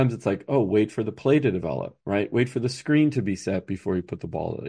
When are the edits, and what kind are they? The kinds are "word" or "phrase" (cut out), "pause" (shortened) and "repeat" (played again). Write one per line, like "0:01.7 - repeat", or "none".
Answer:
0:02.0 - pause